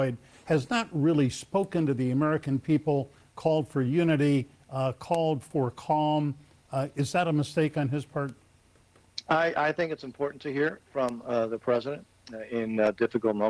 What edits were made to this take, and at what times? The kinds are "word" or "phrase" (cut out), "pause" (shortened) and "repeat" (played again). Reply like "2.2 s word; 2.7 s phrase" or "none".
none

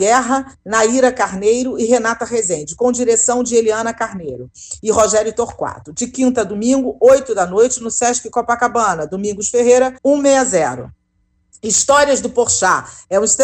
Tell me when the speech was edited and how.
10.0 s pause

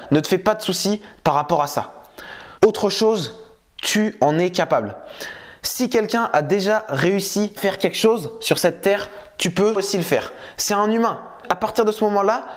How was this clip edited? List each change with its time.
2.6 s pause; 7.6 s word; 9.8 s word; 11.4 s word

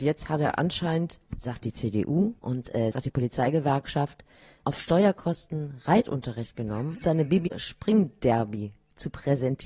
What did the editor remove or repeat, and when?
1.3 s pause; 2.4 s pause; 2.9 s word; 7.0 s word; 7.5 s phrase

